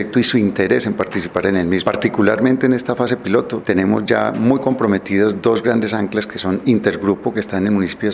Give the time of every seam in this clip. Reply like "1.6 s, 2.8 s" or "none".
none